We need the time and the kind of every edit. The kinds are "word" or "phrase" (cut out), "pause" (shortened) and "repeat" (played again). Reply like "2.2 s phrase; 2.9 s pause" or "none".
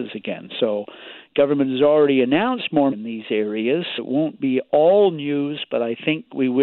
2.9 s word; 4.0 s word